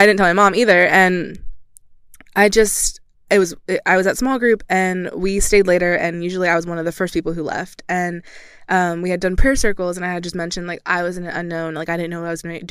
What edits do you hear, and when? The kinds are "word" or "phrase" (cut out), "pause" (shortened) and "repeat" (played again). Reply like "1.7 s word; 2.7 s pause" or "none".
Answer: 3.1 s pause